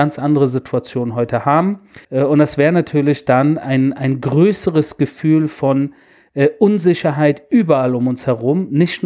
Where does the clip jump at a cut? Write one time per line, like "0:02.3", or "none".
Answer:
0:02.0